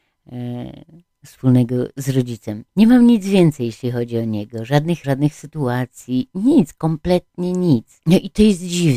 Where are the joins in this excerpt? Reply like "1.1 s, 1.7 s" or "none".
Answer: 1.1 s, 2.7 s, 5.0 s